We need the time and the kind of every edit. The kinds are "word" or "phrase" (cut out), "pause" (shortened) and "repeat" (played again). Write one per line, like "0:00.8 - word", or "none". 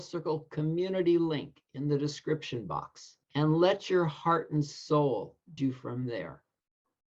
0:03.2 - pause
0:05.6 - word